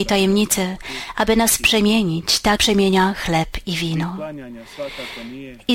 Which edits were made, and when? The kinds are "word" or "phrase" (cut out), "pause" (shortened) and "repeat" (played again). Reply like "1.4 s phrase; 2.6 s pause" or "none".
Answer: 2.6 s word

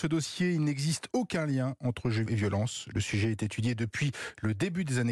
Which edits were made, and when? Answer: 2.3 s word

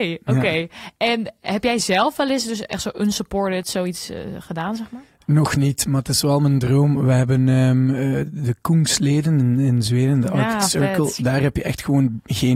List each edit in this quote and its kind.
none

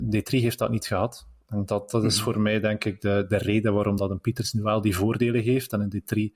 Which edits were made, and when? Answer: none

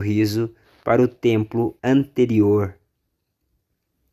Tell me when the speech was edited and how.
1.8 s pause

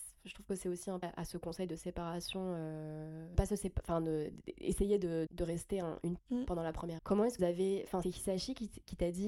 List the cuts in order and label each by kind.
1.0 s word; 3.3 s word; 5.3 s word; 6.2 s word; 7.0 s word; 7.4 s word; 8.0 s word

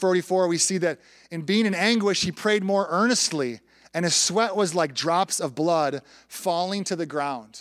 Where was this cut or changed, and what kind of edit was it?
none

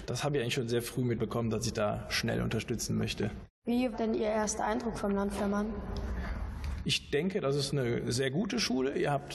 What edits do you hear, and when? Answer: 3.9 s word

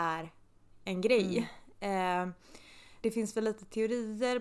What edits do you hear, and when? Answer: 3.0 s word

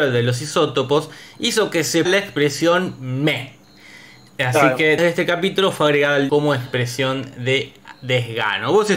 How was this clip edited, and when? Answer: 2.1 s word; 5.0 s word; 6.3 s word

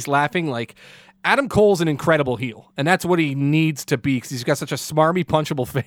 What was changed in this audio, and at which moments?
none

